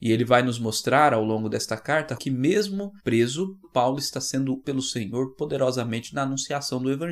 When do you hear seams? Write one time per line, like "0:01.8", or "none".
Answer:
0:02.2
0:04.6

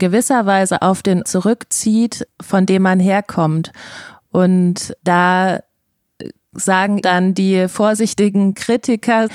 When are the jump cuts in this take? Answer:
0:01.2
0:07.0

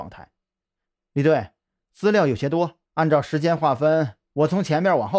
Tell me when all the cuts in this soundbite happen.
0:02.9

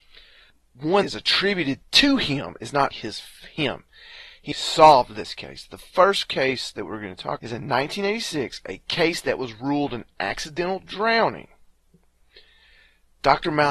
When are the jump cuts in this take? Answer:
0:01.0
0:02.9
0:04.5
0:07.4

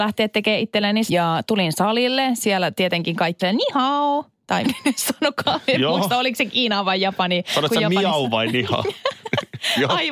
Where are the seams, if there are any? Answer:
0:01.1
0:03.4
0:04.6

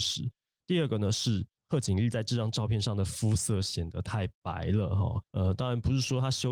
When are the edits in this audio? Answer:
0:01.6
0:05.3

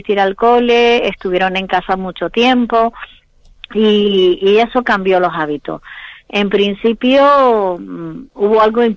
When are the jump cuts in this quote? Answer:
none

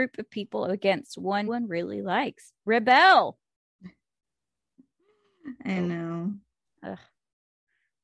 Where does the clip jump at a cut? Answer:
0:01.5
0:06.6

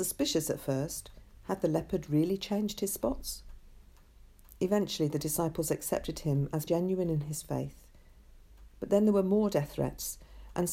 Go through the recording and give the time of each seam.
0:06.7

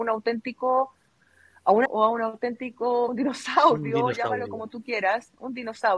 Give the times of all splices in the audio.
0:01.9
0:03.1

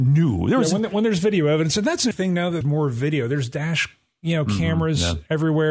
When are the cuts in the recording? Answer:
0:02.1
0:02.6

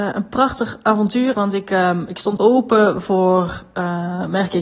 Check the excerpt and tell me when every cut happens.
0:01.3
0:02.4

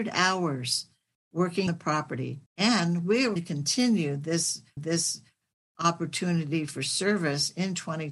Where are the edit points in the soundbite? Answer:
0:01.7
0:02.5
0:03.4
0:04.8

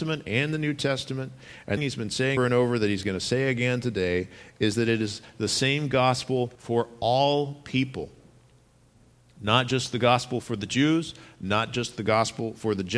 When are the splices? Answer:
0:01.8
0:02.4
0:06.6

